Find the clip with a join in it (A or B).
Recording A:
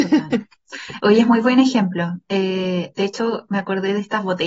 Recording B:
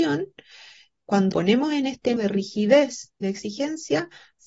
B